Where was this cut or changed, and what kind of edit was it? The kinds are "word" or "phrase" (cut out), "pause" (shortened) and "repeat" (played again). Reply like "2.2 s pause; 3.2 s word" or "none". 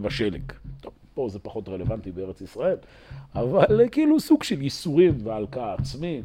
none